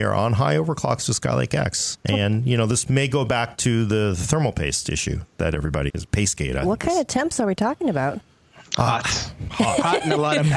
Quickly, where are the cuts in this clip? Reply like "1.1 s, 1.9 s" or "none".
5.9 s, 8.7 s